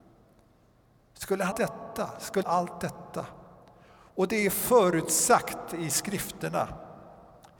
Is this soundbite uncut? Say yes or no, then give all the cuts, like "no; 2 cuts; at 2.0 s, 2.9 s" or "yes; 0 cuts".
no; 2 cuts; at 1.5 s, 2.4 s